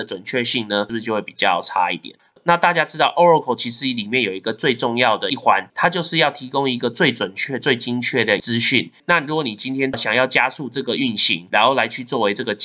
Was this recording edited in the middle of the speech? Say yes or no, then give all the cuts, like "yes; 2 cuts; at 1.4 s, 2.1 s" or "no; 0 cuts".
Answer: no; 0 cuts